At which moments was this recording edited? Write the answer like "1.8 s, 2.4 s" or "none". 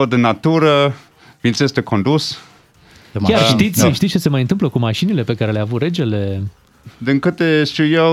none